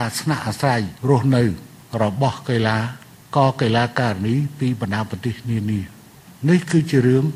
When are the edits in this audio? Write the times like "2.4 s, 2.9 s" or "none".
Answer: 1.0 s